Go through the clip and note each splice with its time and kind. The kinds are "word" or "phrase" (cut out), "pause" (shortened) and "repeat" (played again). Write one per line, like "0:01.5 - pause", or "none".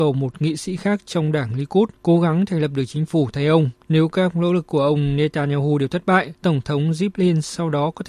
0:02.0 - pause
0:03.8 - pause
0:06.4 - pause